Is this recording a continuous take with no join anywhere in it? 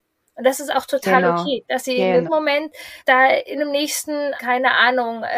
no; 4 cuts; at 2.3 s, 3.0 s, 3.6 s, 4.4 s

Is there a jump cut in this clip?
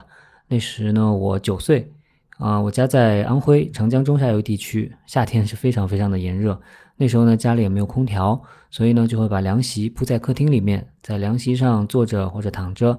no; 0 cuts

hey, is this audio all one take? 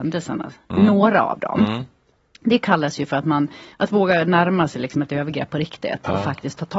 no; 1 cut; at 3.7 s

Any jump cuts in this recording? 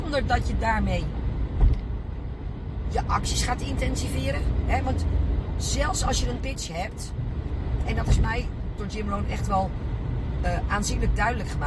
yes; 3 cuts; at 6.4 s, 7.8 s, 8.8 s

